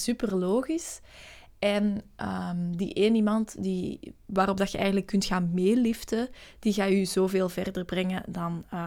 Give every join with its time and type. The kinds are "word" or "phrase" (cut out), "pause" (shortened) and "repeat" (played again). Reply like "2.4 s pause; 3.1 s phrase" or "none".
none